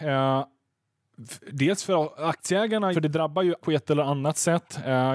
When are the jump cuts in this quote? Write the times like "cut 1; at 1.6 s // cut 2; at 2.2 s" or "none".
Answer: cut 1; at 2.9 s // cut 2; at 3.6 s